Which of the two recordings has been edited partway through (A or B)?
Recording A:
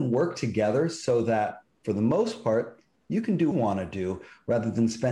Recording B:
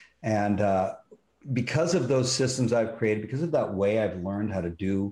A